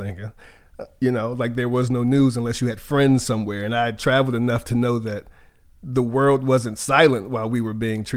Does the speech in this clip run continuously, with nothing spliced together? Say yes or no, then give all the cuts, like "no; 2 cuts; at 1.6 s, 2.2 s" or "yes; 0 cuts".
yes; 0 cuts